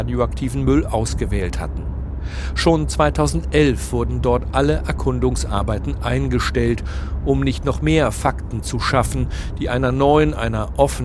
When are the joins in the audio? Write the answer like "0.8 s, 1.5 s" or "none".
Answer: none